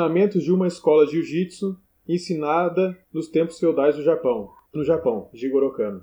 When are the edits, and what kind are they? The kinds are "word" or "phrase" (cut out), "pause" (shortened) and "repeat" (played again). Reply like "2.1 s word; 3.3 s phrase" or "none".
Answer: 3.0 s pause; 4.7 s phrase